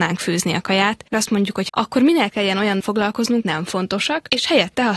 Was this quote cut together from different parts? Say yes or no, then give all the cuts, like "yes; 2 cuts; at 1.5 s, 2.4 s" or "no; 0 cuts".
yes; 5 cuts; at 1.1 s, 1.7 s, 2.3 s, 2.8 s, 3.4 s